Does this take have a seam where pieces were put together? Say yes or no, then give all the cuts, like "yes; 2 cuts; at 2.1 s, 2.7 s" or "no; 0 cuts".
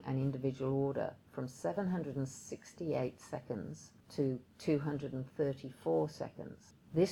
yes; 1 cut; at 1.3 s